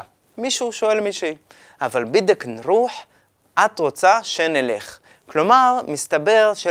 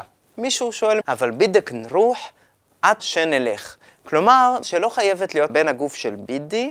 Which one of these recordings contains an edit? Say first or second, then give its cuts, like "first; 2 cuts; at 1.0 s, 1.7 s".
second; 4 cuts; at 1.0 s, 3.0 s, 4.6 s, 5.5 s